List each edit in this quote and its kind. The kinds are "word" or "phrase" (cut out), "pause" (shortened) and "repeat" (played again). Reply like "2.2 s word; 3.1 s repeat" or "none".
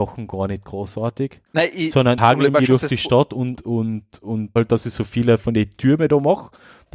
1.5 s pause; 2.2 s word; 3.6 s word; 4.6 s word